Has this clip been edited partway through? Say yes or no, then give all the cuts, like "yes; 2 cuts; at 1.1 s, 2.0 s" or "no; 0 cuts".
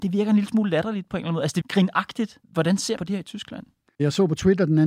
yes; 4 cuts; at 1.6 s, 2.4 s, 3.0 s, 3.9 s